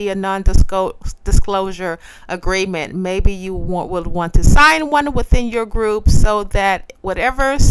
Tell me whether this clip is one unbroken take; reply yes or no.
yes